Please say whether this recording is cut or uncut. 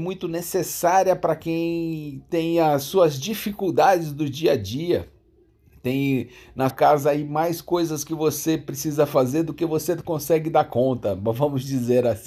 cut